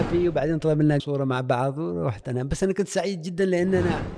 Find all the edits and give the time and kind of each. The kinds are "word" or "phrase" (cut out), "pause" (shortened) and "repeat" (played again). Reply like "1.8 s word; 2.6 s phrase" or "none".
1.0 s phrase; 2.2 s word